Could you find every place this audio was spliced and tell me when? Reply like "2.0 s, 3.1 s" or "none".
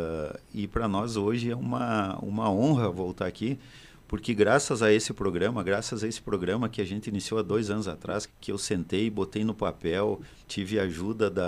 8.3 s, 10.4 s

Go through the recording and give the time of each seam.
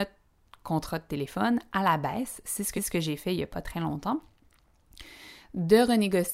2.8 s, 3.6 s

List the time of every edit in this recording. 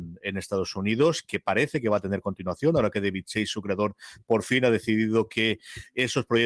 none

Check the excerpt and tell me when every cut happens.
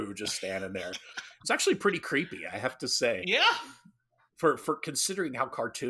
none

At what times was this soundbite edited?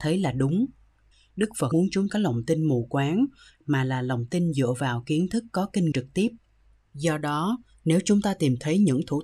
1.7 s, 2.1 s, 5.9 s

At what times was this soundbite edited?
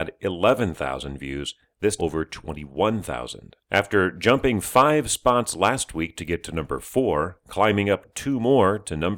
2.0 s, 3.6 s

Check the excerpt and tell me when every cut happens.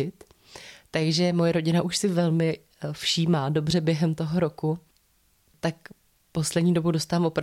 none

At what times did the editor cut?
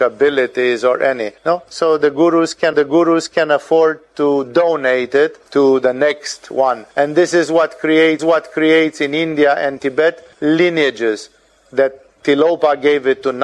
1.4 s, 2.7 s, 5.5 s, 6.9 s, 8.2 s, 10.3 s

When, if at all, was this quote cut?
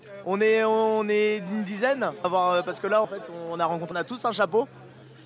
2.2 s, 3.0 s, 3.9 s

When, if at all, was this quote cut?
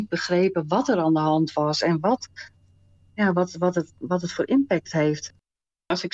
none

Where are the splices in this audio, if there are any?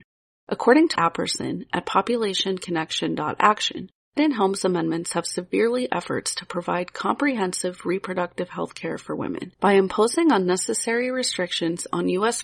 1.0 s, 4.2 s, 5.9 s, 9.5 s

